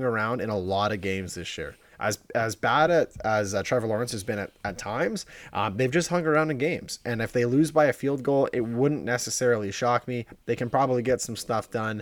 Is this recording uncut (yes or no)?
yes